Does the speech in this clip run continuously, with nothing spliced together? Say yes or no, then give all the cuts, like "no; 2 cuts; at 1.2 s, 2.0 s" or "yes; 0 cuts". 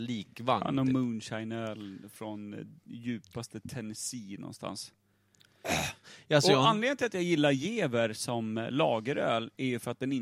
yes; 0 cuts